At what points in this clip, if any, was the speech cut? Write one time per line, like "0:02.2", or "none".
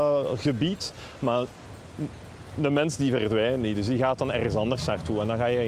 none